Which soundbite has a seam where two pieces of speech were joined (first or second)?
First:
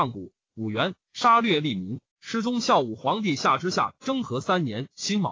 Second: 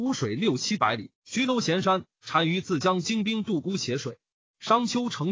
first